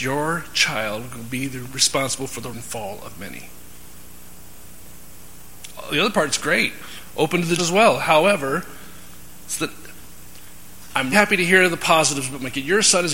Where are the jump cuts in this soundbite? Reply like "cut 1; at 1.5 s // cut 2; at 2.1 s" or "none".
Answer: cut 1; at 2.5 s // cut 2; at 7.6 s // cut 3; at 11.1 s